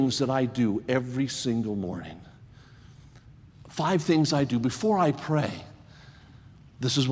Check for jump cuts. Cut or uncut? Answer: uncut